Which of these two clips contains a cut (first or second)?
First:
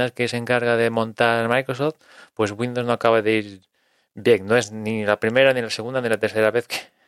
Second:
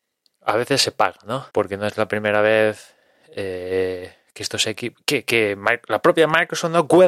second